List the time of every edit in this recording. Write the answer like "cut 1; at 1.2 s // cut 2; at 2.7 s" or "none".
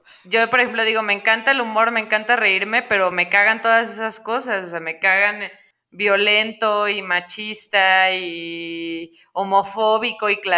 none